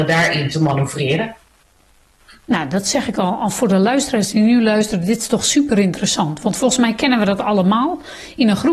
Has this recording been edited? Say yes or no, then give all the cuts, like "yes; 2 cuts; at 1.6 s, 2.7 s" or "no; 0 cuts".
no; 0 cuts